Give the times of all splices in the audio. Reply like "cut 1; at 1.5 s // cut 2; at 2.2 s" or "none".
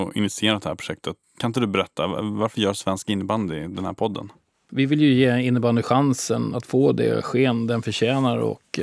none